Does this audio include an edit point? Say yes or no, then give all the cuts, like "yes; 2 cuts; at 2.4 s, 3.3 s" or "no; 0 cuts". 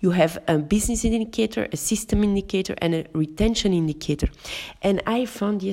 no; 0 cuts